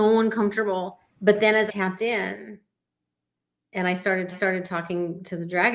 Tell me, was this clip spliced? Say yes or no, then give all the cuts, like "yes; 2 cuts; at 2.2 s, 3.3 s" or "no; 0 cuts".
yes; 3 cuts; at 1.1 s, 1.7 s, 4.3 s